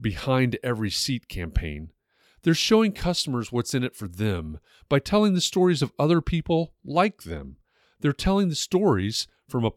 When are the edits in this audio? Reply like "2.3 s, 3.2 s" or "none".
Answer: none